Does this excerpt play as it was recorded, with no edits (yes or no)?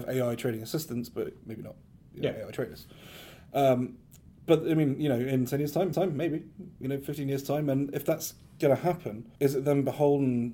no